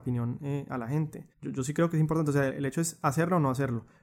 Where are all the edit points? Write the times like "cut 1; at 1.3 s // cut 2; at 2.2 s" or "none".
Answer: cut 1; at 1.3 s // cut 2; at 2.5 s